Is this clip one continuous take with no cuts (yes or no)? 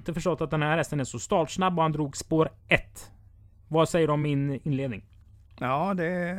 yes